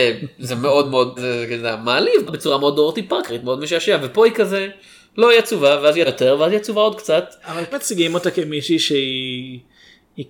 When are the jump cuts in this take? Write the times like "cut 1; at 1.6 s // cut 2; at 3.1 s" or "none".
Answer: cut 1; at 1.2 s // cut 2; at 2.3 s // cut 3; at 6.0 s // cut 4; at 7.7 s